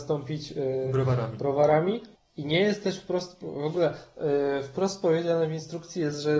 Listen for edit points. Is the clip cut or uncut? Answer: cut